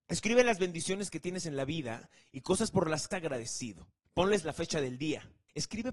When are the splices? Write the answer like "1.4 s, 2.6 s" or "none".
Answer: 3.1 s